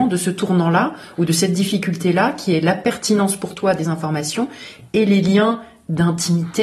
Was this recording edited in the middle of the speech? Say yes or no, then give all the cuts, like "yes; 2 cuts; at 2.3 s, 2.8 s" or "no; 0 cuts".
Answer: no; 0 cuts